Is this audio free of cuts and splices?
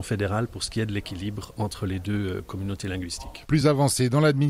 yes; 0 cuts

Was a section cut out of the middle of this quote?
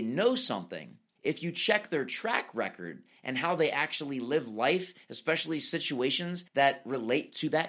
yes; 2 cuts; at 1.2 s, 6.5 s

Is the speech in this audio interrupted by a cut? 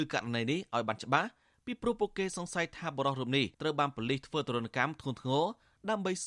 yes; 1 cut; at 3.5 s

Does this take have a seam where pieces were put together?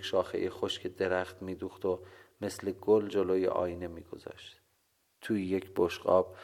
no; 0 cuts

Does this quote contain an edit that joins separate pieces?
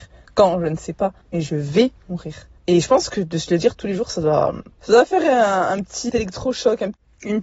yes; 4 cuts; at 1.2 s, 2.6 s, 4.7 s, 6.1 s

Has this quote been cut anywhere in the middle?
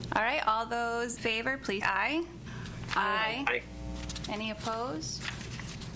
yes; 2 cuts; at 1.2 s, 1.8 s

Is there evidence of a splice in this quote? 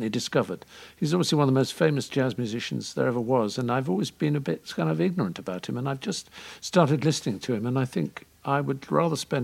no; 0 cuts

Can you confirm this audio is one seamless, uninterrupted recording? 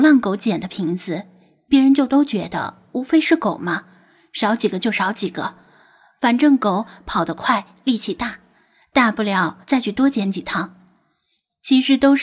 no; 1 cut; at 9.6 s

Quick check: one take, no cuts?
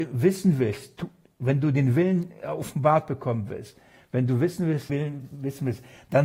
no; 1 cut; at 4.9 s

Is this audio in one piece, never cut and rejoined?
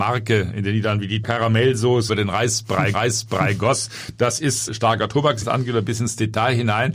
no; 5 cuts; at 1.2 s, 2.1 s, 2.9 s, 4.7 s, 5.4 s

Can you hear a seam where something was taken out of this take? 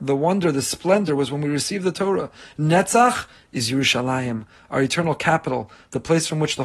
no; 0 cuts

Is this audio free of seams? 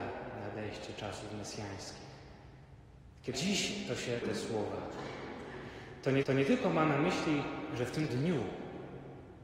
no; 4 cuts; at 3.3 s, 4.2 s, 6.2 s, 8.1 s

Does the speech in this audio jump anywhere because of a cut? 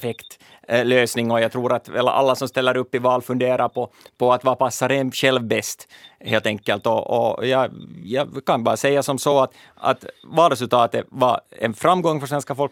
no; 0 cuts

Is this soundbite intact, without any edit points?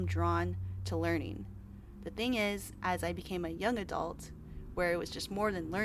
yes; 0 cuts

